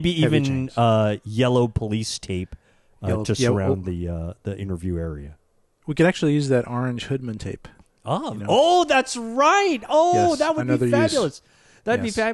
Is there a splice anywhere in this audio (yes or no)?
no